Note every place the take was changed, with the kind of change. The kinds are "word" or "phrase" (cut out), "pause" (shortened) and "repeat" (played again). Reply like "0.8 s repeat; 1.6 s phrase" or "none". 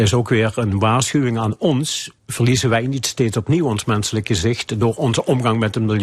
2.2 s pause